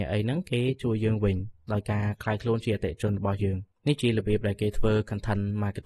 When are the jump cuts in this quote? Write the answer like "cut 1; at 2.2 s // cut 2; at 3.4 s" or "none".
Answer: cut 1; at 3.7 s